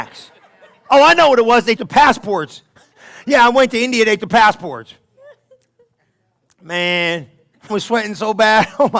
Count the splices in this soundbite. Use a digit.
3